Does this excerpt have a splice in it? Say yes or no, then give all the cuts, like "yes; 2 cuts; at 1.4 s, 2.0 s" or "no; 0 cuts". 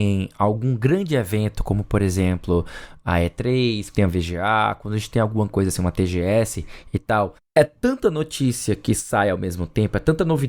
yes; 1 cut; at 3.9 s